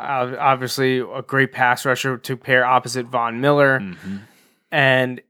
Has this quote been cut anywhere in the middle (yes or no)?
no